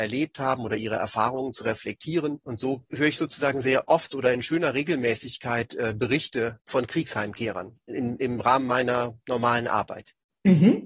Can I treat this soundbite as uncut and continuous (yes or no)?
yes